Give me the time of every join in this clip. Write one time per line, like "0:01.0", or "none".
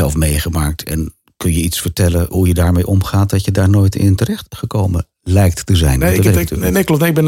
0:02.3